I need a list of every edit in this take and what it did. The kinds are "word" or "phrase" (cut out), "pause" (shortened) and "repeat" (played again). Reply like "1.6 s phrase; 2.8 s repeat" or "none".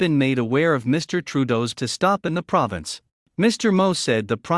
1.7 s word; 3.1 s pause